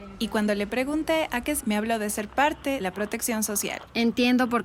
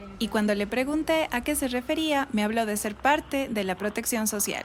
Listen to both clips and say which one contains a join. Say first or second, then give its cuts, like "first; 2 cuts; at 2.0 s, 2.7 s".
first; 2 cuts; at 1.6 s, 2.8 s